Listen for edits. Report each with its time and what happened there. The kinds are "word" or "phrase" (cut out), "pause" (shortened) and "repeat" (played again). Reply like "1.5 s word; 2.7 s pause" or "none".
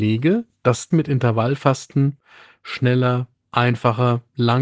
0.9 s word; 3.4 s word